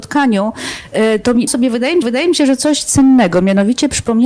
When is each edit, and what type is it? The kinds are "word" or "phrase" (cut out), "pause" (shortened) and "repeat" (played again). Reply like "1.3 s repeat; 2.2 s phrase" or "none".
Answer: 1.5 s word; 2.0 s repeat